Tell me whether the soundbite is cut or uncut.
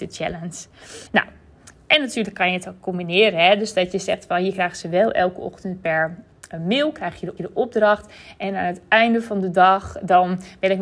cut